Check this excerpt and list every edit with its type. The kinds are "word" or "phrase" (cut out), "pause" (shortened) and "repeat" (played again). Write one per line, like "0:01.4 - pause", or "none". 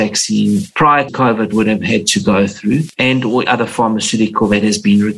0:01.1 - word
0:03.4 - word